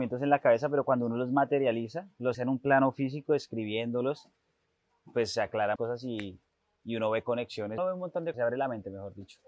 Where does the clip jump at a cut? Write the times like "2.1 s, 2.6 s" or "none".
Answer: 2.3 s, 5.8 s, 7.8 s, 8.3 s